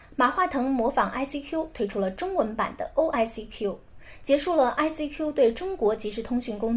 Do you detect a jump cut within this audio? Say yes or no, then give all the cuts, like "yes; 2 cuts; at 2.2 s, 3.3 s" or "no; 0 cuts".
no; 0 cuts